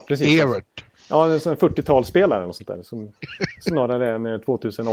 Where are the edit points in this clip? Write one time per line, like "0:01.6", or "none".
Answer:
none

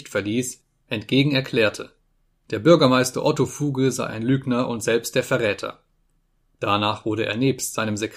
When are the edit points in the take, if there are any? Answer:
none

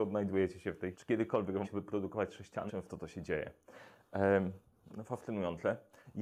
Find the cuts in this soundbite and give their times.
0:00.9
0:01.6
0:02.7

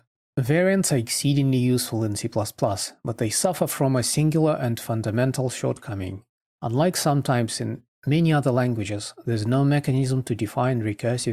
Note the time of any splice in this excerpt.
none

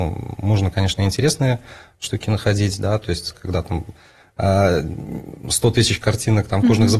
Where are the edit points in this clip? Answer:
none

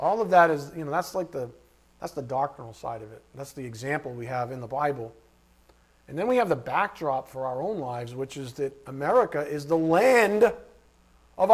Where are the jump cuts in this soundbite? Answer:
none

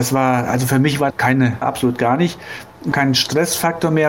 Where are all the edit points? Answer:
0:01.1
0:01.6
0:02.9

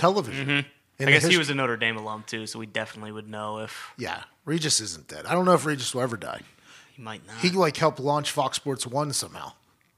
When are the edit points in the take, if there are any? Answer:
none

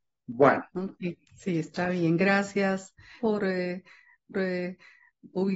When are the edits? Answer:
0:01.3
0:03.2
0:04.3

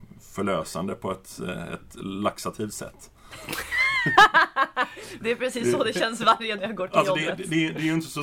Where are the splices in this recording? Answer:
0:06.6

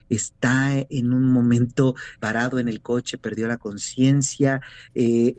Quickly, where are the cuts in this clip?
0:02.2

